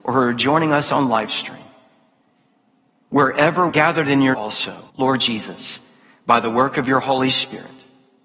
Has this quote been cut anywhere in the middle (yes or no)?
yes